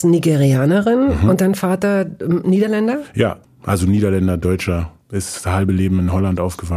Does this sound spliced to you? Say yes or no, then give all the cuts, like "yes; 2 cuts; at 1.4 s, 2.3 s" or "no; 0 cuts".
yes; 1 cut; at 5.0 s